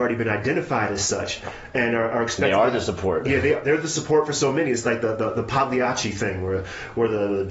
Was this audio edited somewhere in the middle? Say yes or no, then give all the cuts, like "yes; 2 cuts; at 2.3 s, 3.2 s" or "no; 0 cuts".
no; 0 cuts